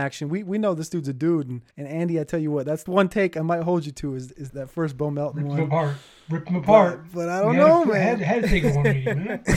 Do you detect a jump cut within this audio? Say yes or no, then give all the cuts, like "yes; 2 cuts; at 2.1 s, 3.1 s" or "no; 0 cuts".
yes; 3 cuts; at 1.7 s, 2.9 s, 4.5 s